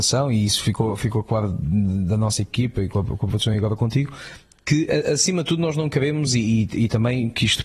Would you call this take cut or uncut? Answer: uncut